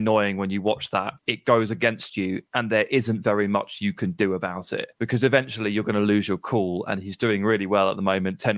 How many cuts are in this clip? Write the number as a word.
three